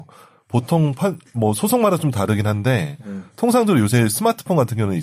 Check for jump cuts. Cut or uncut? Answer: uncut